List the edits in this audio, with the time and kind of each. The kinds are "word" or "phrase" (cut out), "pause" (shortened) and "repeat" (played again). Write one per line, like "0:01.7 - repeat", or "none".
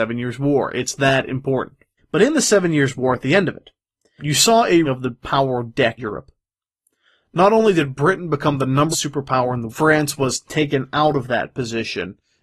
0:02.0 - pause
0:04.2 - word
0:04.8 - phrase
0:06.0 - word
0:08.9 - word
0:09.7 - phrase